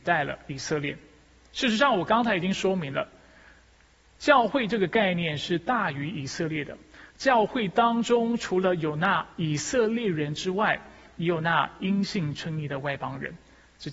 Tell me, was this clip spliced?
no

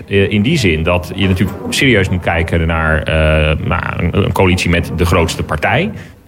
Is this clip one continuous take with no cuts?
yes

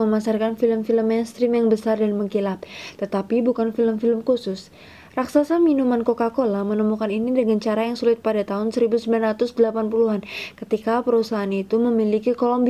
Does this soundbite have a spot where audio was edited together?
no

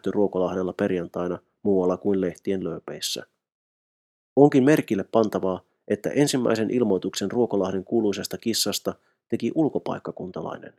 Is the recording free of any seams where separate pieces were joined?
yes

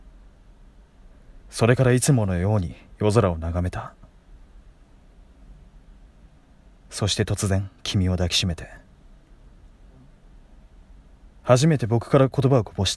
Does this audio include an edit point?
yes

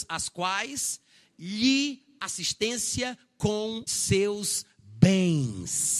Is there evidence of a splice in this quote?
yes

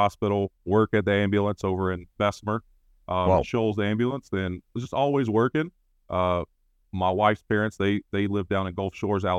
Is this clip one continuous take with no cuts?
yes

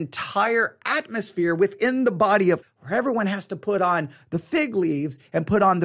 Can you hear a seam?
yes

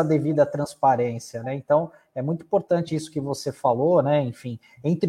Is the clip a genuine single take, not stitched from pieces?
yes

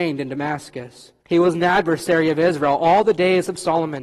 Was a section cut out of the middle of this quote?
yes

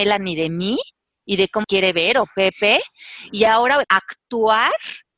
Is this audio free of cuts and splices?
no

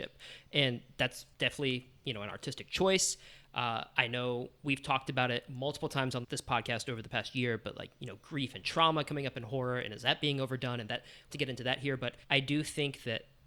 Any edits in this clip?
yes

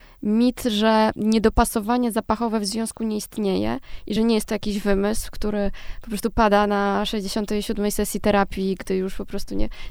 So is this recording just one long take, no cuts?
yes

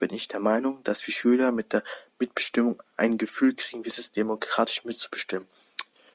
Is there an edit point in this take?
no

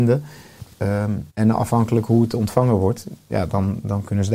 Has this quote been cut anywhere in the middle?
yes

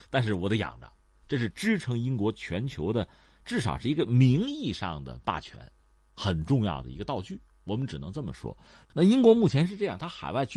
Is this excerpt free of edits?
yes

